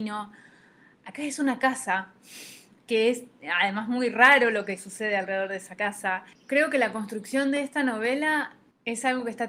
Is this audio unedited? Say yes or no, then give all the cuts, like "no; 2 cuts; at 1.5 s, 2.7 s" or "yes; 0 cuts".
yes; 0 cuts